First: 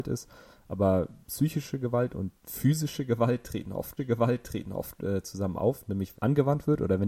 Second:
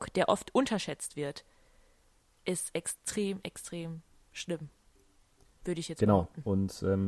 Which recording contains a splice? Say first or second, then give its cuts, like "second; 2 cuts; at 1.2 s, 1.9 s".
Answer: first; 4 cuts; at 1.2 s, 2.4 s, 4.0 s, 6.1 s